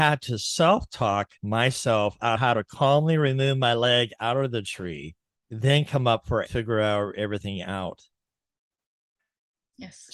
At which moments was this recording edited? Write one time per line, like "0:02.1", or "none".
0:01.4
0:02.4
0:05.4
0:06.4